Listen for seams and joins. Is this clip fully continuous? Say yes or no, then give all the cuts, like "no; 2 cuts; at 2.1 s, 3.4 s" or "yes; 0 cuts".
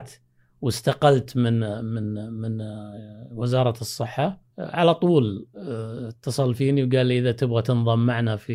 no; 1 cut; at 4.5 s